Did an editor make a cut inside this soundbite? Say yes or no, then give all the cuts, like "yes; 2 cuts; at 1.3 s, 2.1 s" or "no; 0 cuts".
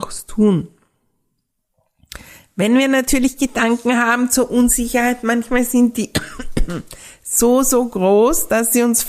no; 0 cuts